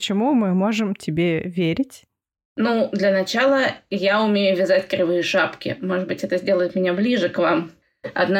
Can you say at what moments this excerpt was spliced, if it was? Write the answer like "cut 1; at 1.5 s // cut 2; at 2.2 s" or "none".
none